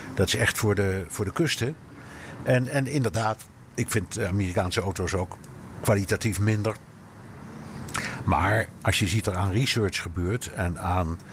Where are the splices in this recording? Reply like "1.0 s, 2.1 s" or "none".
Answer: 9.2 s